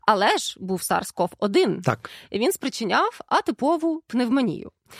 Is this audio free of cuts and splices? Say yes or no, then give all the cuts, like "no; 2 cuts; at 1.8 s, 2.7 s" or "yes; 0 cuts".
yes; 0 cuts